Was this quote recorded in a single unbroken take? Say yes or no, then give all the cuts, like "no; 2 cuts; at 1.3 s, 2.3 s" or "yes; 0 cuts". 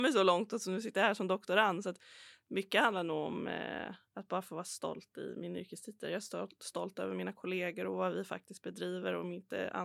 yes; 0 cuts